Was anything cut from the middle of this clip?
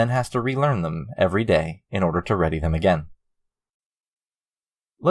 no; 0 cuts

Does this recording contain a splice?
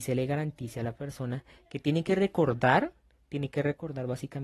no; 0 cuts

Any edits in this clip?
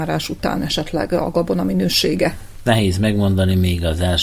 no; 0 cuts

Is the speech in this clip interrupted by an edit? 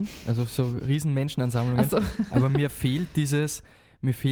no; 0 cuts

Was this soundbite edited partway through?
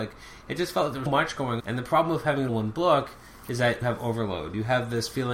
yes; 4 cuts; at 1.1 s, 1.6 s, 2.5 s, 3.8 s

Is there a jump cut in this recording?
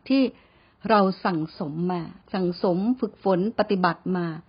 yes; 1 cut; at 2.2 s

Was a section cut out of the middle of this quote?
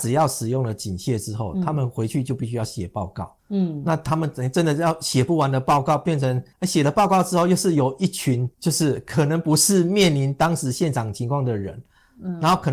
yes; 3 cuts; at 3.4 s, 6.5 s, 8.5 s

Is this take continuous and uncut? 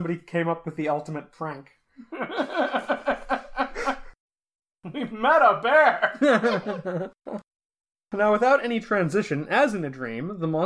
yes; 0 cuts

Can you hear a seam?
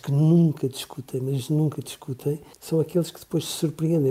yes; 1 cut; at 2.5 s

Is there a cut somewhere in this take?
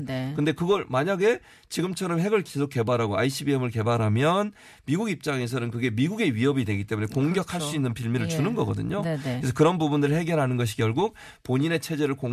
no; 0 cuts

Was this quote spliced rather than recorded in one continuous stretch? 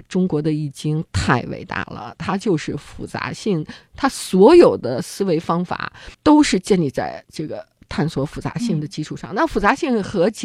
yes; 1 cut; at 6.1 s

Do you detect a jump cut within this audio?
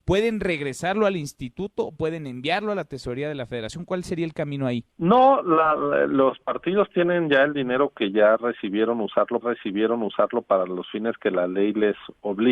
yes; 2 cuts; at 4.9 s, 9.4 s

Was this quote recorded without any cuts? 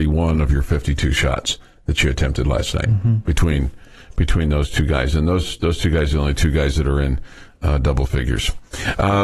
yes; 0 cuts

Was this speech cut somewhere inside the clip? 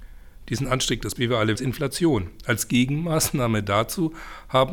yes; 2 cuts; at 1.2 s, 1.6 s

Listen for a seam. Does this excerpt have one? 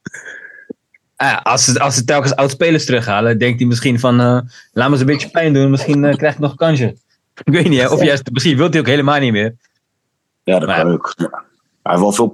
no; 0 cuts

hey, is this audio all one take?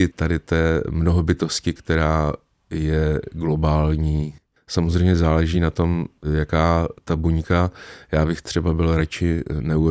yes; 0 cuts

